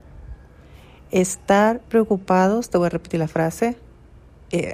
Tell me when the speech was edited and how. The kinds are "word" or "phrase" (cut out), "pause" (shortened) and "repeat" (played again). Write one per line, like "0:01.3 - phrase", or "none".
none

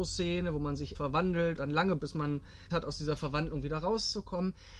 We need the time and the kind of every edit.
0:00.9 - word
0:01.6 - word
0:02.0 - word
0:02.7 - word

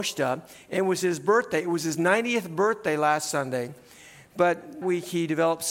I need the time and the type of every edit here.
0:04.8 - word

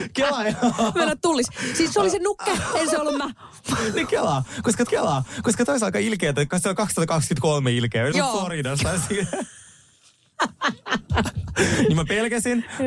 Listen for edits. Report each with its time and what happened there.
0:04.9 - repeat
0:08.1 - word

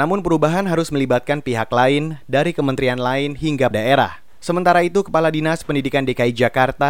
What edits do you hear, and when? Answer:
0:03.7 - word

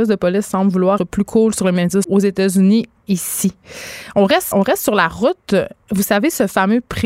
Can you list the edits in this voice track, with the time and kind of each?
0:01.0 - word
0:02.0 - word
0:03.0 - word
0:04.5 - word

